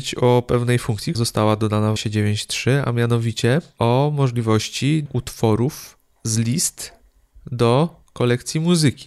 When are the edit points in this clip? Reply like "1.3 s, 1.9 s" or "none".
1.1 s, 2.0 s, 3.8 s, 5.1 s